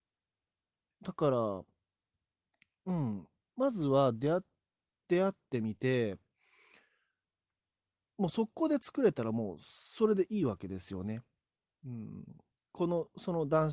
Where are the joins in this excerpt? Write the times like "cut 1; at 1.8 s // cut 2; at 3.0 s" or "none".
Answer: none